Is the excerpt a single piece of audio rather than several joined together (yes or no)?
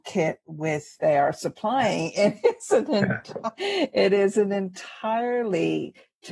no